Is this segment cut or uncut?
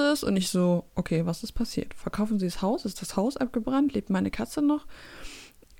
uncut